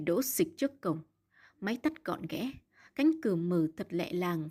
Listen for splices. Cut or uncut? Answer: uncut